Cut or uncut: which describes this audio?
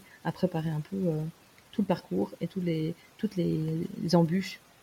uncut